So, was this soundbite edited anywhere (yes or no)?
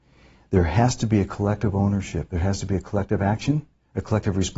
no